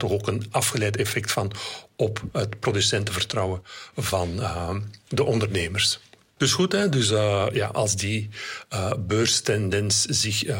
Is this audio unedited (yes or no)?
yes